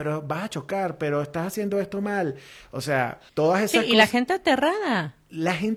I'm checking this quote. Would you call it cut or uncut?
cut